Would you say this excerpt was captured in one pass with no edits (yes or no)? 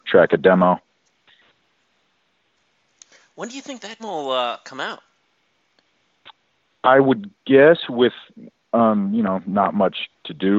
no